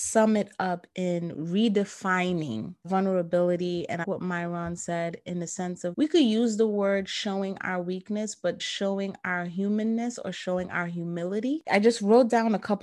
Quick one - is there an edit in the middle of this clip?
yes; 4 cuts; at 2.8 s, 4.0 s, 5.9 s, 8.6 s

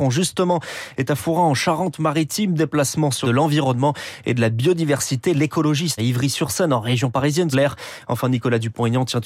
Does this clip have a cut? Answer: yes; 3 cuts; at 3.2 s, 6.0 s, 7.5 s

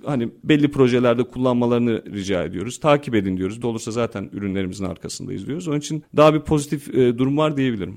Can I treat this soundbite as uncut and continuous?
no; 1 cut; at 3.6 s

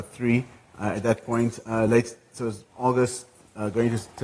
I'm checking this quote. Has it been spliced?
no; 0 cuts

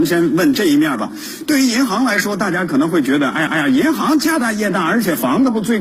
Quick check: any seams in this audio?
yes; 1 cut; at 3.5 s

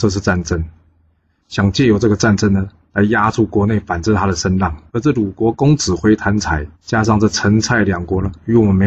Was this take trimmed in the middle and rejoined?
yes; 2 cuts; at 4.9 s, 6.7 s

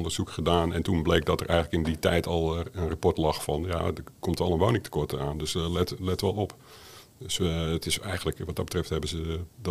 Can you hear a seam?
no; 0 cuts

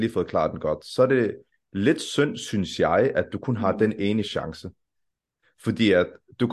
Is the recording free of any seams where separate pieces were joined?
yes; 0 cuts

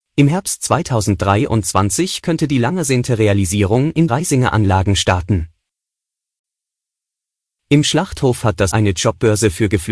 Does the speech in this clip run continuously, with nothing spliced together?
no; 2 cuts; at 4.1 s, 8.7 s

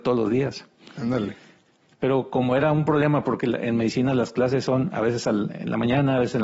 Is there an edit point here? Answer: no; 0 cuts

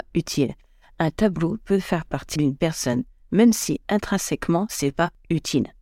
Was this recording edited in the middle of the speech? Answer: yes; 1 cut; at 2.4 s

